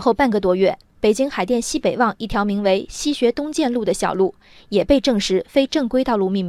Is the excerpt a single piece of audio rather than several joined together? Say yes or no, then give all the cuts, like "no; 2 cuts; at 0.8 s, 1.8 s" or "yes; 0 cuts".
yes; 0 cuts